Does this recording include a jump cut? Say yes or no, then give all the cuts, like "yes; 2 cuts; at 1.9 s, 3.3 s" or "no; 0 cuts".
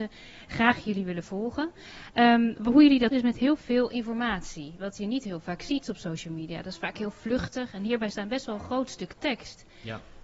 yes; 1 cut; at 3.1 s